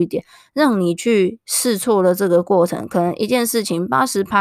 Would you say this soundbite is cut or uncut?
cut